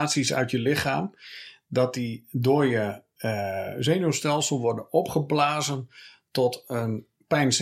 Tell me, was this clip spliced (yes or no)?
no